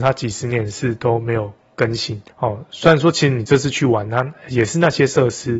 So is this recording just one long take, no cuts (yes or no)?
no